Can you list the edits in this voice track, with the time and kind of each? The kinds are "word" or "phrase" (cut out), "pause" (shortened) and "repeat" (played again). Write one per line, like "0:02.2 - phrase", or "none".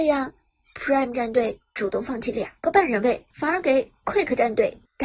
0:03.3 - pause